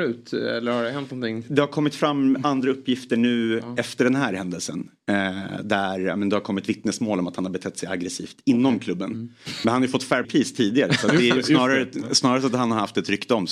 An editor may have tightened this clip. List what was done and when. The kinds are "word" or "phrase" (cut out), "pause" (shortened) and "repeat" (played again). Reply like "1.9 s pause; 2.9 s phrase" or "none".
10.2 s word